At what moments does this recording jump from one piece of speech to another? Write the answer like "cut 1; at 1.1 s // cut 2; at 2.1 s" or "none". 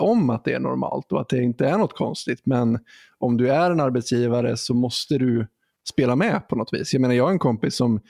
none